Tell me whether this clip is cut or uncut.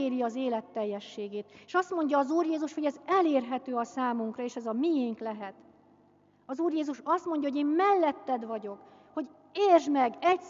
uncut